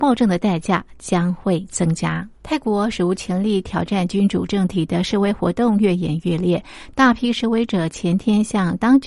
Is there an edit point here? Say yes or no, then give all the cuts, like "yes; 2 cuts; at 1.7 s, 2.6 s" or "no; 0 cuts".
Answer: yes; 1 cut; at 2.4 s